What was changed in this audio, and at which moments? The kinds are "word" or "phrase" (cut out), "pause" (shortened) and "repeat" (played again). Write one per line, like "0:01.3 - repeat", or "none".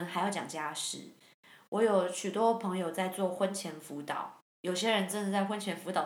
0:04.5 - pause